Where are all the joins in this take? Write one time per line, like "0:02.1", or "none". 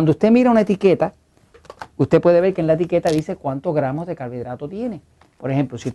none